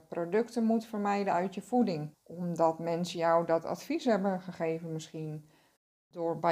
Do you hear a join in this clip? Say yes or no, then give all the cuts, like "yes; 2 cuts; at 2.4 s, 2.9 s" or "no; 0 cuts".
yes; 1 cut; at 2.1 s